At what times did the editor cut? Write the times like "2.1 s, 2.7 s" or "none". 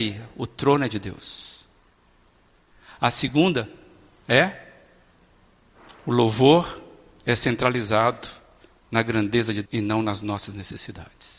9.6 s